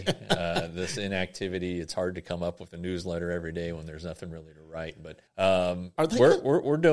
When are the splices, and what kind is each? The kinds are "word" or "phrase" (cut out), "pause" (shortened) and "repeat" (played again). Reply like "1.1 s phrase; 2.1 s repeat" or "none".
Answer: 5.3 s pause